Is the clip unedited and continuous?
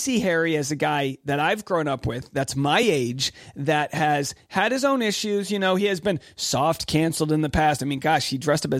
yes; 0 cuts

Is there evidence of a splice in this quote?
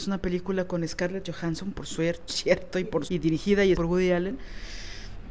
yes; 3 cuts; at 2.3 s, 3.1 s, 3.7 s

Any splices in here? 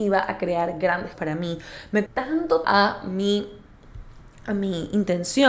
yes; 3 cuts; at 1.1 s, 2.1 s, 2.6 s

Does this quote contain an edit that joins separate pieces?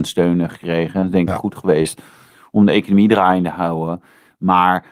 no; 0 cuts

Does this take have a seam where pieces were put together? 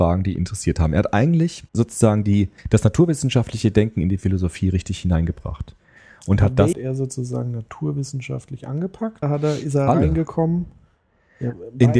yes; 4 cuts; at 1.7 s, 2.6 s, 6.7 s, 9.2 s

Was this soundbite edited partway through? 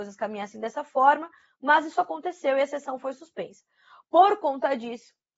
no; 0 cuts

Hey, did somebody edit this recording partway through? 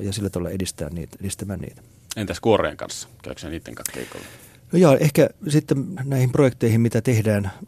yes; 1 cut; at 6.0 s

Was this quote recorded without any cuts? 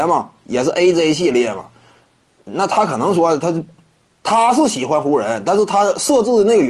yes; 0 cuts

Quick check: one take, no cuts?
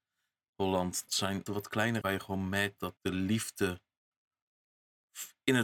no; 4 cuts; at 1.1 s, 1.5 s, 2.0 s, 3.0 s

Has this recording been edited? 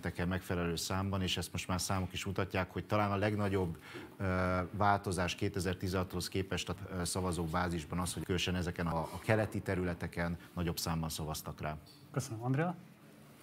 yes; 3 cuts; at 6.8 s, 8.2 s, 8.9 s

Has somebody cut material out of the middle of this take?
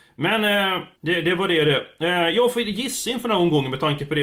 yes; 1 cut; at 0.9 s

